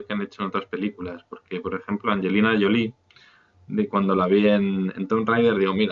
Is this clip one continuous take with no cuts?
yes; 0 cuts

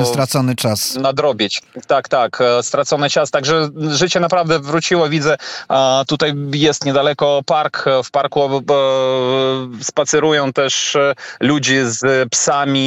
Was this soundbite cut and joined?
no; 0 cuts

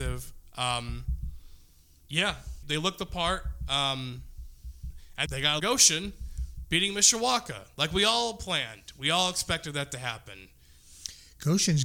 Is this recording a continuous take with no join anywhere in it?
no; 3 cuts; at 2.6 s, 5.3 s, 5.6 s

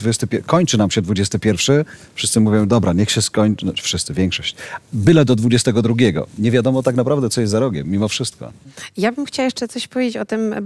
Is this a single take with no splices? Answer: yes; 0 cuts

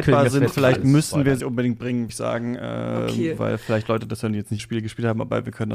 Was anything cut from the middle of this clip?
yes; 3 cuts; at 1.4 s, 2.1 s, 4.6 s

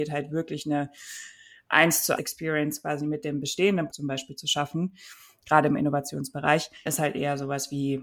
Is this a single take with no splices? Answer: no; 3 cuts; at 2.2 s, 3.9 s, 6.9 s

